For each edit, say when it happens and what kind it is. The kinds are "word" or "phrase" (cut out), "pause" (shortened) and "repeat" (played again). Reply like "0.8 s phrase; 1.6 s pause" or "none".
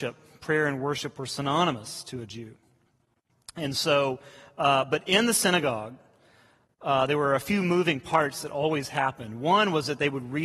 none